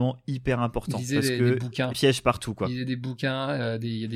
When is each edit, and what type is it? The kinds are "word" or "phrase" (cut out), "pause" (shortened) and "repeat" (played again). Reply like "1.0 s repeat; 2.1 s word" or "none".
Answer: 1.9 s phrase